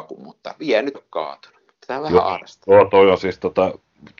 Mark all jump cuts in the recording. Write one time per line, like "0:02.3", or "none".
0:00.9